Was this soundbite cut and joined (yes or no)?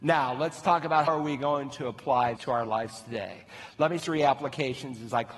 yes